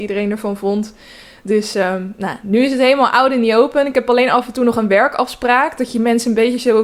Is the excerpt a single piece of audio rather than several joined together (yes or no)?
yes